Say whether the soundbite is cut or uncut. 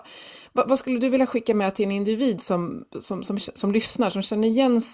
uncut